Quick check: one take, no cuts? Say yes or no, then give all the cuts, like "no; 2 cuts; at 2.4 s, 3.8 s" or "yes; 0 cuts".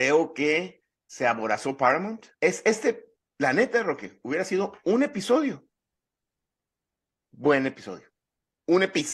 no; 3 cuts; at 1.0 s, 2.3 s, 3.2 s